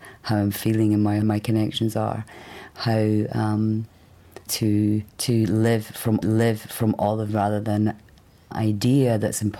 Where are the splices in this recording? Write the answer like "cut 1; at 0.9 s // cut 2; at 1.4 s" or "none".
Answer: cut 1; at 1.2 s // cut 2; at 4.5 s // cut 3; at 5.1 s // cut 4; at 6.2 s // cut 5; at 7.3 s // cut 6; at 8.5 s